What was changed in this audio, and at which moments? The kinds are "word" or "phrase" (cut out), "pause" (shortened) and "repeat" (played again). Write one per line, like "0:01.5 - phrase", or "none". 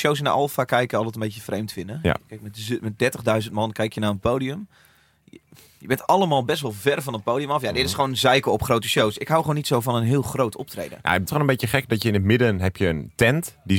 0:11.3 - word